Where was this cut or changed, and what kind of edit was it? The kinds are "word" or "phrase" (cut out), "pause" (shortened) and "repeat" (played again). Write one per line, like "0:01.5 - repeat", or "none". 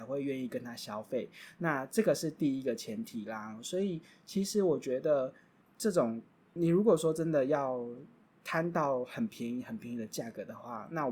0:06.6 - word